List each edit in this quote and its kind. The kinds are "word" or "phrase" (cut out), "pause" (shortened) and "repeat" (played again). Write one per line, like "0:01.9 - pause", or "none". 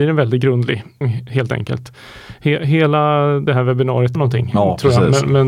0:01.0 - word
0:03.5 - word
0:04.1 - phrase